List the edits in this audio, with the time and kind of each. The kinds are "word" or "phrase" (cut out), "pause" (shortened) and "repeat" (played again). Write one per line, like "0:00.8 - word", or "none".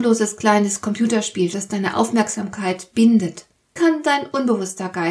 0:01.5 - word
0:03.8 - word